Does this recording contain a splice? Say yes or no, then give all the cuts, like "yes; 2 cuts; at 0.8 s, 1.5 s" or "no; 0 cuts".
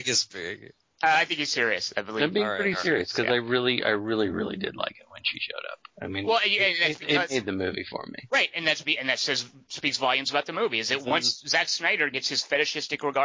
no; 0 cuts